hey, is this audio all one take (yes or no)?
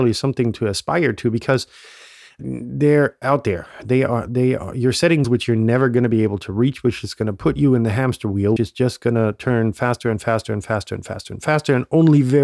no